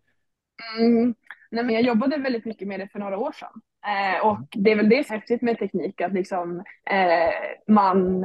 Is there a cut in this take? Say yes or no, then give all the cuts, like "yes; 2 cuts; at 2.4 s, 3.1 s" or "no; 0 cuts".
yes; 3 cuts; at 1.7 s, 5.1 s, 6.8 s